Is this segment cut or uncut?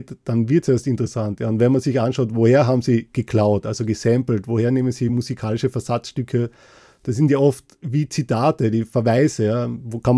uncut